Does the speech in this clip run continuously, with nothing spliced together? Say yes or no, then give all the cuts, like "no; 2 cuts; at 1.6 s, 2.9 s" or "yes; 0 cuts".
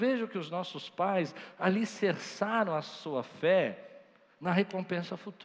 yes; 0 cuts